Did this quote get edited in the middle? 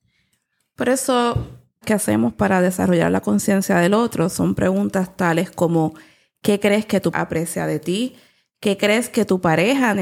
yes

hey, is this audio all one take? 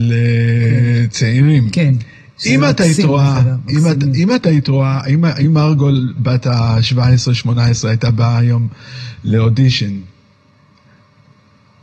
yes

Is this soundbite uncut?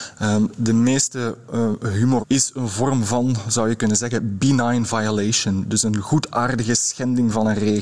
no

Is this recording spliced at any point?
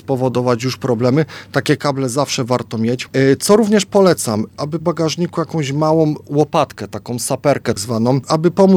yes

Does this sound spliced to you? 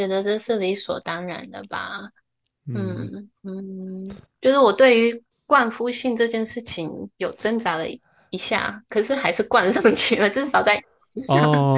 yes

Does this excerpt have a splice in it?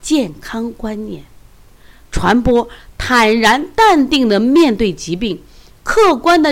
no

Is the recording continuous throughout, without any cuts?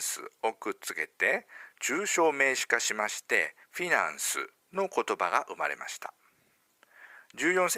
no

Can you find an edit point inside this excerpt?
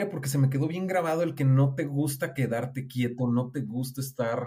no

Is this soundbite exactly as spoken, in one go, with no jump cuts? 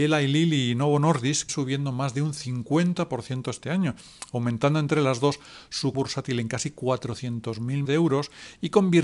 no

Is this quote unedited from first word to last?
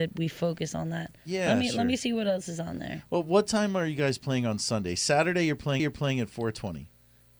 no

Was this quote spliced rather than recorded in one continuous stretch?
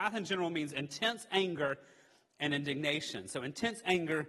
no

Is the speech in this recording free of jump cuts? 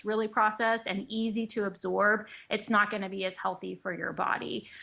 yes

